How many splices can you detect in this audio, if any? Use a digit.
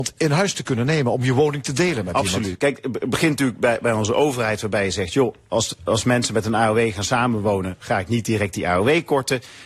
0